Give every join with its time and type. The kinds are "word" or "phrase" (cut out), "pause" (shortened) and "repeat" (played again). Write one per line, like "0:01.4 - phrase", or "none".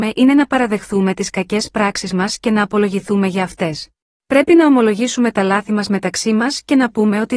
0:04.2 - pause